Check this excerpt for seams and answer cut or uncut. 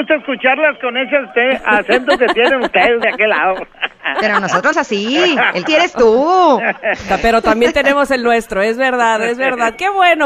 cut